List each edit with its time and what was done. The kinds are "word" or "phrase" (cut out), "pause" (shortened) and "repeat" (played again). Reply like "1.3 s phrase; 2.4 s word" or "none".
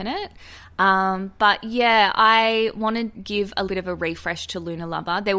3.1 s word; 3.7 s word